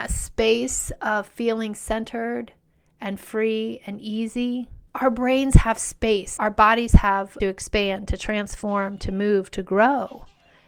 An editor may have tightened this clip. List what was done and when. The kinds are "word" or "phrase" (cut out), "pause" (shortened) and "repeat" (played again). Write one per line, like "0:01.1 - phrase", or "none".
0:04.9 - pause
0:06.4 - word
0:07.4 - phrase